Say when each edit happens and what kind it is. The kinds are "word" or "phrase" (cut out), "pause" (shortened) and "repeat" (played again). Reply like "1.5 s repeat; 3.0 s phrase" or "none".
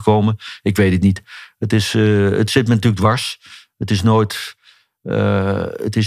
none